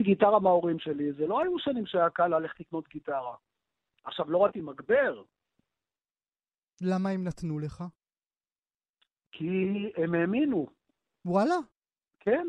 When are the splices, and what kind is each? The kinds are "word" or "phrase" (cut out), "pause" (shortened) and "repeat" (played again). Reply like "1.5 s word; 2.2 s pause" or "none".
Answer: 4.5 s phrase

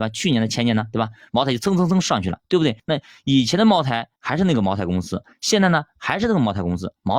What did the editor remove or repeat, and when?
2.4 s pause; 2.8 s pause; 4.2 s pause

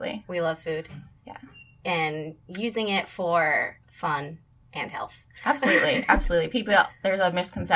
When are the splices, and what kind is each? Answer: 3.8 s pause

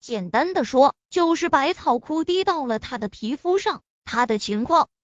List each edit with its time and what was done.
3.9 s pause

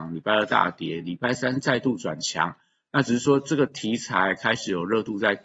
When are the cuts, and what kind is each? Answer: none

